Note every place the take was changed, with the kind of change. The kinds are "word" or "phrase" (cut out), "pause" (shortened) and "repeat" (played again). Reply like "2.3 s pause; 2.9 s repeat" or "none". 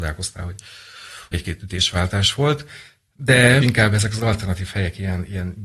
1.3 s word; 3.6 s word